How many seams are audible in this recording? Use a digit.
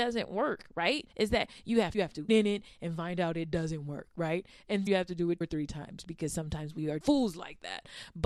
6